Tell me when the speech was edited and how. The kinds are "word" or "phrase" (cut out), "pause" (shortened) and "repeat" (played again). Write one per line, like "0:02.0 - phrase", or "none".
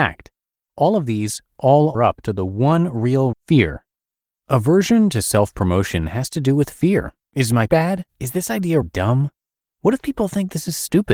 0:01.9 - word
0:03.3 - phrase
0:07.2 - pause
0:07.7 - word
0:08.1 - pause
0:08.8 - word